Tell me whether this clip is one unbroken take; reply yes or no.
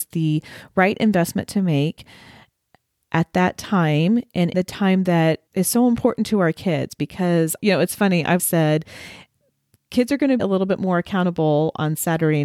no